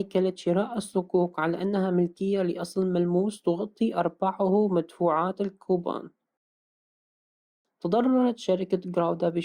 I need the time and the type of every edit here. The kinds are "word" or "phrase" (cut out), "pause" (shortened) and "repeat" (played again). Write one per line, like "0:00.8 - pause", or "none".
none